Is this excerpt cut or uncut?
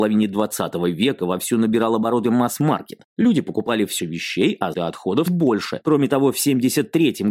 cut